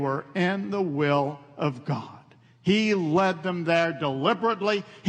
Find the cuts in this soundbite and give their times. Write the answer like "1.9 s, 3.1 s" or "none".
none